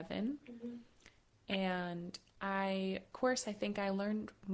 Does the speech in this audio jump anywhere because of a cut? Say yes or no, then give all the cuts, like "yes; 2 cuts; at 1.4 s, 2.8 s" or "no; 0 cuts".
yes; 1 cut; at 3.1 s